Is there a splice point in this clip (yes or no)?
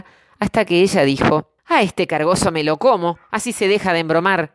yes